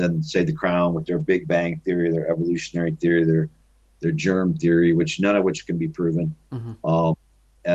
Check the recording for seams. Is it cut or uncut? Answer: uncut